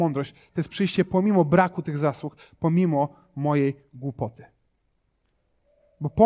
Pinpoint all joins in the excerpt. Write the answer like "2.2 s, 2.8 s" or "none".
none

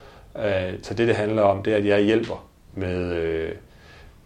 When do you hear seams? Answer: none

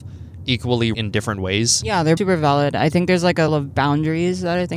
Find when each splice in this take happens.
0.9 s, 2.2 s, 3.5 s

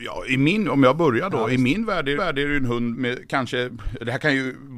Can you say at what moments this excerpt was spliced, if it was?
2.2 s, 2.9 s

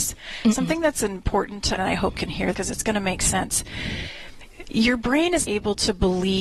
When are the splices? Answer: 1.8 s, 2.1 s, 2.5 s, 5.4 s

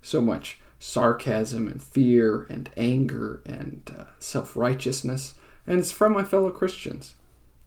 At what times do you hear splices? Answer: none

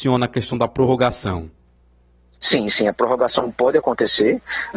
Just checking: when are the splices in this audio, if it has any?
none

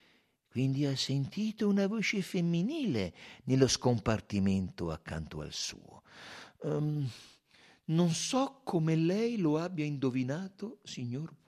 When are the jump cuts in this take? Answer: none

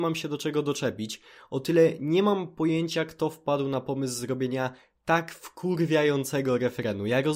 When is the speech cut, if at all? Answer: none

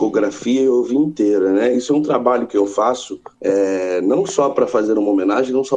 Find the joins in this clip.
3.3 s

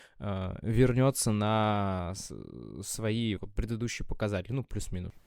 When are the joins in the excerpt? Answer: 3.4 s

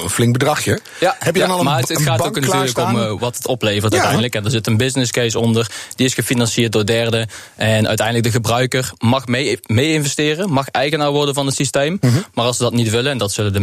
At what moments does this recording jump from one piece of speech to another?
none

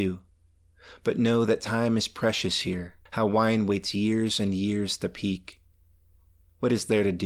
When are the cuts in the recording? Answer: 3.1 s

